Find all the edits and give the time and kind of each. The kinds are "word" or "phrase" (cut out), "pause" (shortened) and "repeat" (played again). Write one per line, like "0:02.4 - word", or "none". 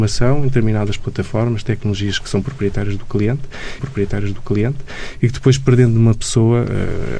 0:03.8 - repeat